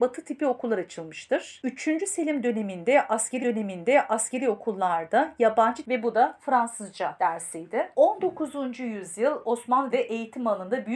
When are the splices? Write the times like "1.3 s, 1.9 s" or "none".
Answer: 3.4 s, 5.8 s, 9.9 s

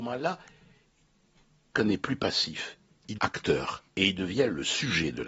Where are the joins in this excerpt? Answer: 1.7 s, 3.2 s, 3.9 s

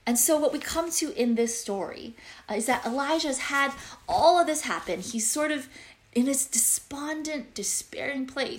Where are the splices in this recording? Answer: none

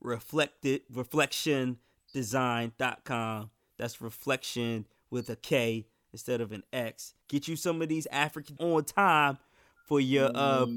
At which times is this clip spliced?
7.2 s, 8.6 s

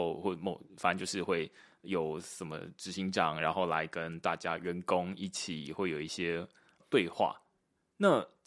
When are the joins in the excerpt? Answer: none

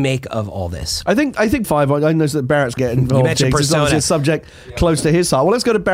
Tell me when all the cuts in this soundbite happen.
1.6 s, 2.8 s

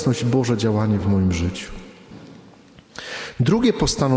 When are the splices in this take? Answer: none

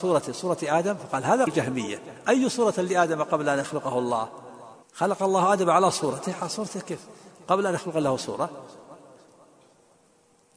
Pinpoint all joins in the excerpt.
1.5 s, 4.8 s

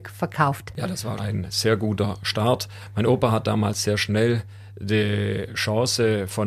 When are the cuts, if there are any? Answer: 1.2 s

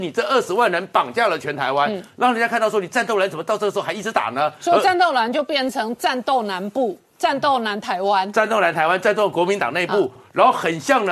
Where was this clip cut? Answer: 10.2 s

